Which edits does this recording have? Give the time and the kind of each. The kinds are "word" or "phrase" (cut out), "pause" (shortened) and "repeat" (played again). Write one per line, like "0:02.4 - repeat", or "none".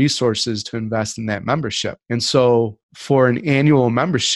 0:02.0 - pause
0:02.8 - pause